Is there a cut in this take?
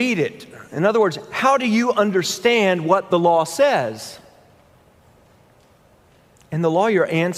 no; 0 cuts

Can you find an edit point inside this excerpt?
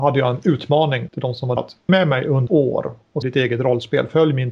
yes; 5 cuts; at 1.1 s, 1.6 s, 1.9 s, 2.5 s, 3.2 s

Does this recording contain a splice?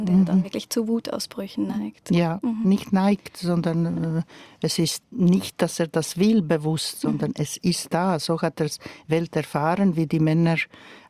no; 0 cuts

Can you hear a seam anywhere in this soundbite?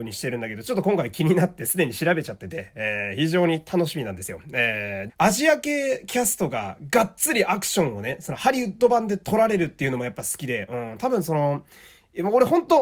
yes; 1 cut; at 5.1 s

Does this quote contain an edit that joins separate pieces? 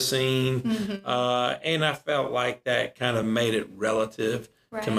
no; 0 cuts

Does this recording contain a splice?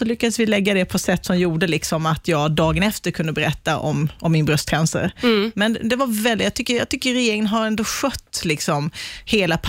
no; 0 cuts

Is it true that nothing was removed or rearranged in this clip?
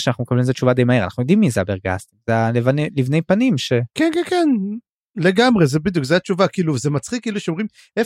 yes; 0 cuts

